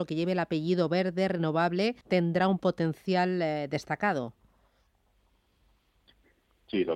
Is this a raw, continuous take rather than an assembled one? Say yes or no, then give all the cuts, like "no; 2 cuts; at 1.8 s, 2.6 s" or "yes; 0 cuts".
no; 1 cut; at 2.0 s